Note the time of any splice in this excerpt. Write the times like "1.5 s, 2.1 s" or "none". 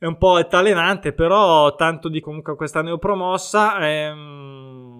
2.2 s